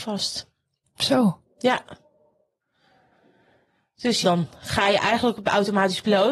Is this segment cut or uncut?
cut